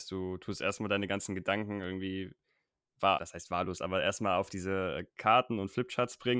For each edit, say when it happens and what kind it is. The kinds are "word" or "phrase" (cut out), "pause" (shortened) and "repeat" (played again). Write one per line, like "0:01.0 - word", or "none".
0:03.2 - word